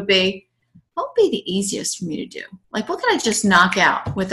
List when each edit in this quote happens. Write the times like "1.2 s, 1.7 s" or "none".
2.6 s